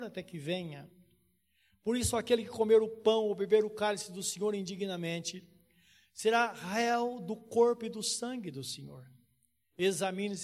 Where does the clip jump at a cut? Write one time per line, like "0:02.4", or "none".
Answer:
none